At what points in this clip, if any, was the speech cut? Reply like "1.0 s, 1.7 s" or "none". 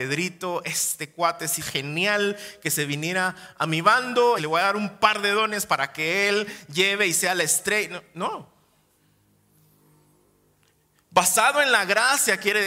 1.6 s, 4.4 s